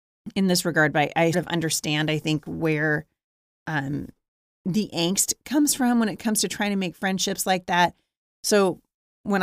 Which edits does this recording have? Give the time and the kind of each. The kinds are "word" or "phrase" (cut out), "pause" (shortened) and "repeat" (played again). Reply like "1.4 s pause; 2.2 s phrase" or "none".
1.3 s word